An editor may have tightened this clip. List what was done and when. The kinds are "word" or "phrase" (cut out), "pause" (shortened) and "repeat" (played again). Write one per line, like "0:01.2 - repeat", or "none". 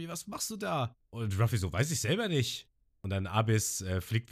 none